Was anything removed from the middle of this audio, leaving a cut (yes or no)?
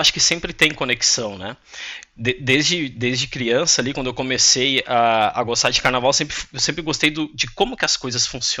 no